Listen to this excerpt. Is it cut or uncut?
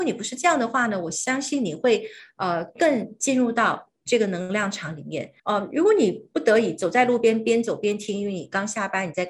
cut